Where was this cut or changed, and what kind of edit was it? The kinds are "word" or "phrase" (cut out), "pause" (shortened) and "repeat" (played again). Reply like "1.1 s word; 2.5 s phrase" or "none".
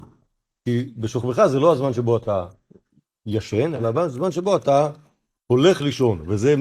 none